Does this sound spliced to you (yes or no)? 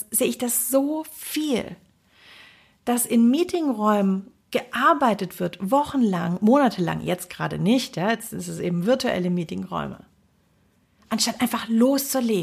no